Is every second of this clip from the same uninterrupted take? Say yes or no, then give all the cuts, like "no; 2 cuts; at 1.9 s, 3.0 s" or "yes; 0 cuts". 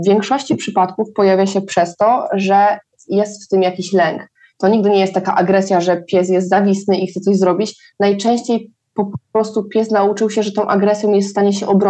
yes; 0 cuts